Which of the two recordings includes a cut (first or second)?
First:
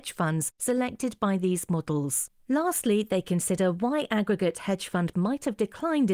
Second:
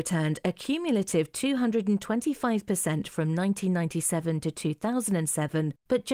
first